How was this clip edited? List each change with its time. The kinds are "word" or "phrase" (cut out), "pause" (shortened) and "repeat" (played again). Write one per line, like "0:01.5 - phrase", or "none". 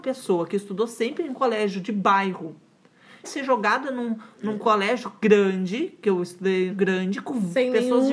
0:03.2 - word
0:06.7 - phrase